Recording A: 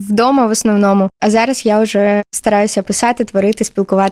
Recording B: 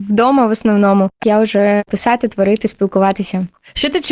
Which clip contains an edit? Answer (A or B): B